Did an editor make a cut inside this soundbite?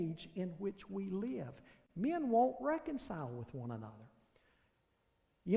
no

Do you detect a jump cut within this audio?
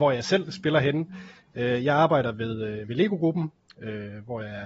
no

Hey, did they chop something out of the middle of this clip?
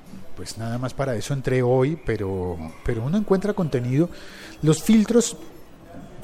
no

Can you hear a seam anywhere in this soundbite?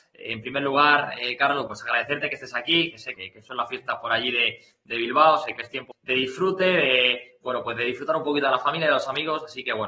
yes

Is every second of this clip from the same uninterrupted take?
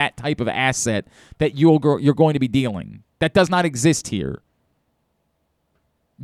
yes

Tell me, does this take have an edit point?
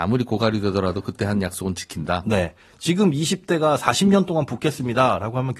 no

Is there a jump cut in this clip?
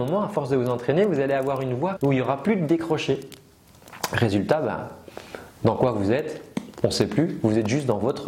yes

